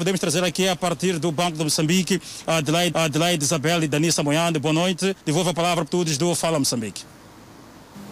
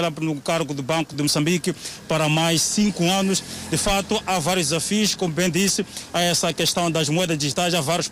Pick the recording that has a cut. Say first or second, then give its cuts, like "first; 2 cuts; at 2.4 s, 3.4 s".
first; 3 cuts; at 2.9 s, 5.2 s, 5.9 s